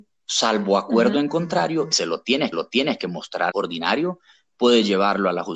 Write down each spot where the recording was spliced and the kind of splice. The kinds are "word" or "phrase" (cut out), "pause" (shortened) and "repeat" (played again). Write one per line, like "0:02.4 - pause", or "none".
0:01.9 - phrase
0:02.5 - repeat
0:03.5 - phrase